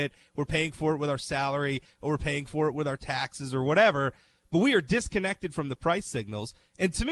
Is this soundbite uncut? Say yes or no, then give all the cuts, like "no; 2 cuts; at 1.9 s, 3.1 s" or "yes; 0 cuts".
yes; 0 cuts